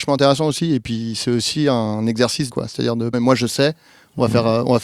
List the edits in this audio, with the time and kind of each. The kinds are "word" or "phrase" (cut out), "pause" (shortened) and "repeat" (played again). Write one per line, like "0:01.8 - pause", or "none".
0:02.5 - word
0:03.1 - phrase